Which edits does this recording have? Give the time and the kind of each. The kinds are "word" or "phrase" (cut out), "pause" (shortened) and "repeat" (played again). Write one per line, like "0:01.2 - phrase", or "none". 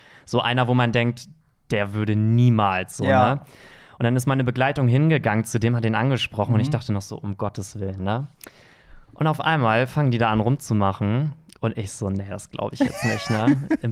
none